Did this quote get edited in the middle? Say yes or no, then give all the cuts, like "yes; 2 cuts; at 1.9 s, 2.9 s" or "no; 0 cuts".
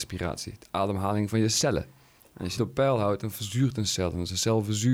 yes; 1 cut; at 2.6 s